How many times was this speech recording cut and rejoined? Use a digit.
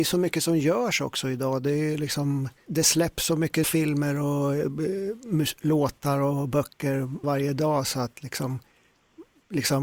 3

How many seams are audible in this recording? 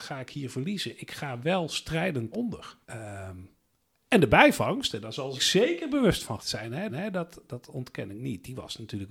5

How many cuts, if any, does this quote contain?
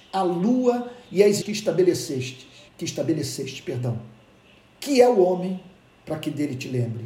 2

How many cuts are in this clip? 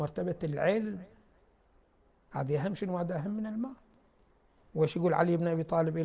0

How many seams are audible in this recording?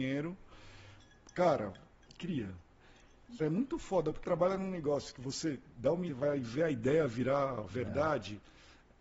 4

